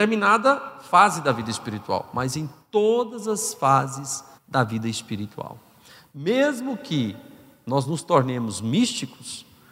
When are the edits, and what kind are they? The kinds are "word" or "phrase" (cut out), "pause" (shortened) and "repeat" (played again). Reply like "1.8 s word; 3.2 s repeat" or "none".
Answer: 4.4 s pause